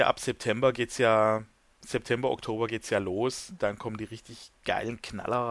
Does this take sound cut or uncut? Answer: uncut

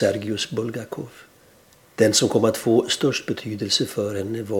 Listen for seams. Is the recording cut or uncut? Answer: cut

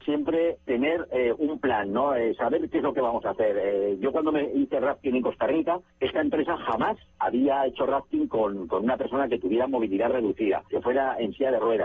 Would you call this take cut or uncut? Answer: uncut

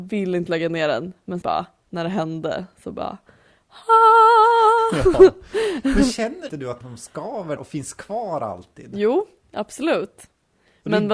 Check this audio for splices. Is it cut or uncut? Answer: cut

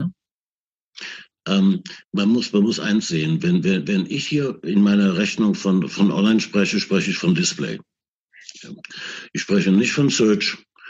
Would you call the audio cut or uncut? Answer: cut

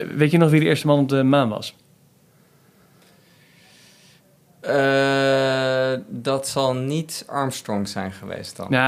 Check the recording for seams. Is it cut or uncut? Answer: uncut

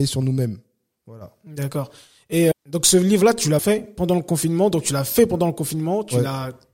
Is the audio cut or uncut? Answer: cut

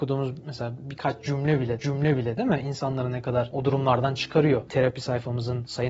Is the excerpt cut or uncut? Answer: cut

